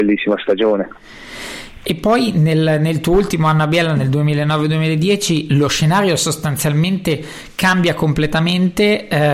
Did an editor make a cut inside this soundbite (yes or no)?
no